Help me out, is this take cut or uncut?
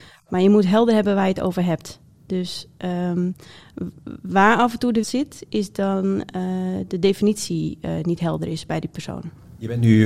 cut